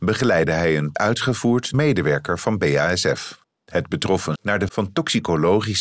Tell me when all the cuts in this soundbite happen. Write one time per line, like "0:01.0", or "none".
0:00.9
0:01.7
0:03.4
0:04.4
0:04.7